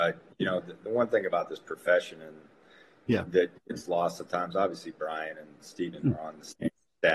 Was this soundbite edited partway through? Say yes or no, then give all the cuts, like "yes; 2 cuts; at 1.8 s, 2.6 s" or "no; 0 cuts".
no; 0 cuts